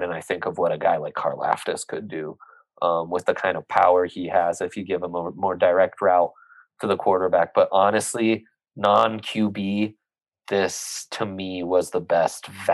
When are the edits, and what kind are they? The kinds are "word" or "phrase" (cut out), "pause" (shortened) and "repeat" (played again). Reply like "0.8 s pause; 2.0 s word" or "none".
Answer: none